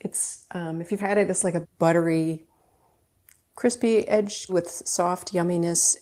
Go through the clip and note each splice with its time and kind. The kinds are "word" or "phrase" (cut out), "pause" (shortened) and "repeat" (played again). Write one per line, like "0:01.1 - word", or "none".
0:01.0 - word
0:01.6 - word
0:04.5 - word